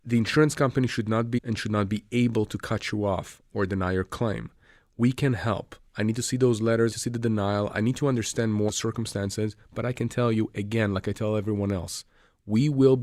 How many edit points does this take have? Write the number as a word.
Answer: three